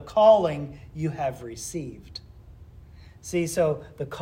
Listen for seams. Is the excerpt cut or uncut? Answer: uncut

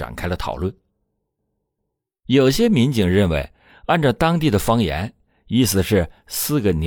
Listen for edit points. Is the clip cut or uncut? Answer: uncut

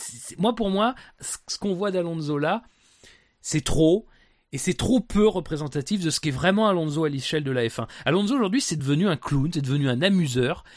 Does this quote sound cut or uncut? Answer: uncut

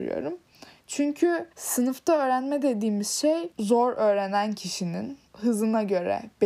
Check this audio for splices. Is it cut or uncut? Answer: cut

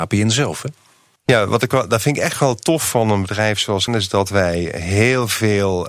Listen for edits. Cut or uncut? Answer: cut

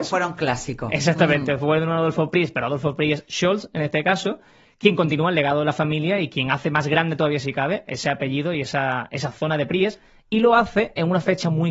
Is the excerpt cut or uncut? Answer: uncut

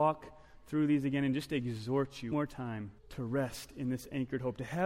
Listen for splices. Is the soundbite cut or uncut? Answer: cut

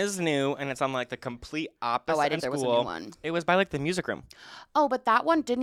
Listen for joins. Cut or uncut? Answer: cut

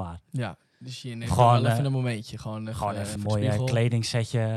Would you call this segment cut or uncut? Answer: cut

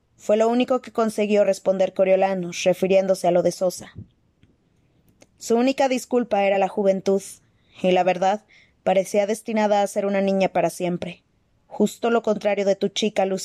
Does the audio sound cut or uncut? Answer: uncut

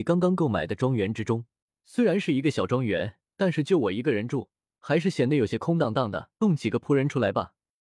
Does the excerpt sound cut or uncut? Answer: cut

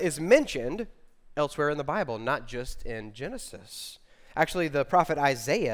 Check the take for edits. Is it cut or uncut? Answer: uncut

